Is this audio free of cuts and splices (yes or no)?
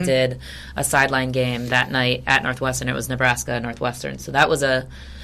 yes